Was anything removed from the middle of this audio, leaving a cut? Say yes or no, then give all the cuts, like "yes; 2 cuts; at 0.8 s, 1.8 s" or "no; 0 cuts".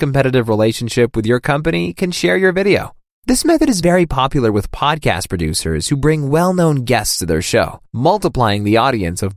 no; 0 cuts